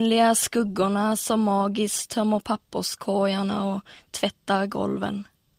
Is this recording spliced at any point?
no; 0 cuts

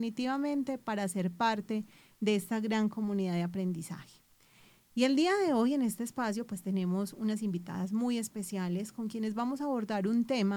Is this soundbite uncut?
yes; 0 cuts

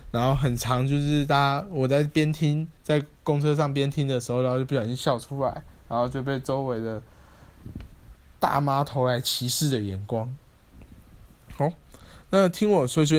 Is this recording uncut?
yes; 0 cuts

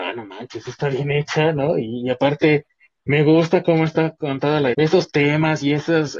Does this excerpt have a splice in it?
yes; 1 cut; at 4.7 s

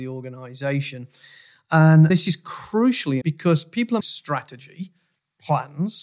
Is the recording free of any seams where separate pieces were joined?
no; 3 cuts; at 2.1 s, 3.2 s, 4.0 s

